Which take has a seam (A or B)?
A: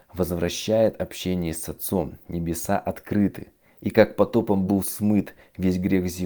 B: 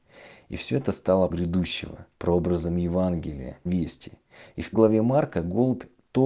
B